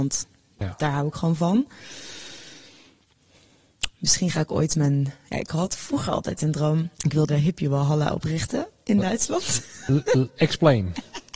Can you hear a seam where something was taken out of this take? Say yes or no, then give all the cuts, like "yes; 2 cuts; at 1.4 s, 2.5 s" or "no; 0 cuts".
yes; 2 cuts; at 6.9 s, 7.3 s